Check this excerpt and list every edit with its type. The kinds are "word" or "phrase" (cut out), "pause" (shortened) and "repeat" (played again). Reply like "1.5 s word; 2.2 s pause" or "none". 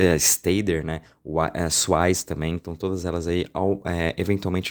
none